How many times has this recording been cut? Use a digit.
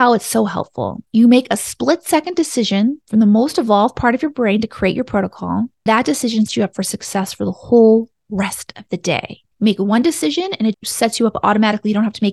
6